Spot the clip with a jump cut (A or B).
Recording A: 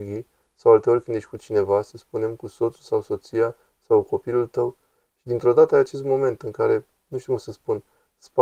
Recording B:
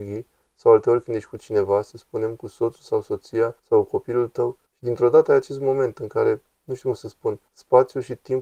B